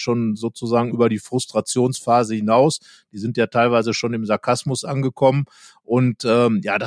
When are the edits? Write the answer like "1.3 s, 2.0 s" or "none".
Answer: none